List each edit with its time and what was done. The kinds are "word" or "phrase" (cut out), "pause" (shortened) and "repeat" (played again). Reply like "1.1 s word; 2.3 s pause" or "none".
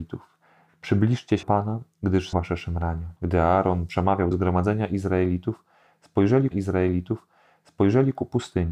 1.4 s word; 2.3 s word; 3.2 s pause; 4.3 s phrase; 6.5 s repeat